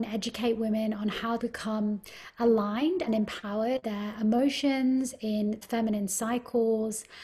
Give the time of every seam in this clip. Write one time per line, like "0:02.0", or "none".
0:01.4
0:03.1
0:03.8
0:05.6